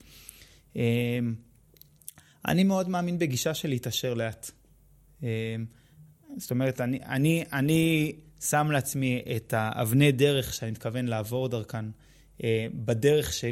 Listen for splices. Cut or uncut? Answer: uncut